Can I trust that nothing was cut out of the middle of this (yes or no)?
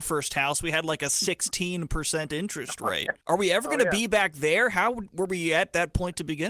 no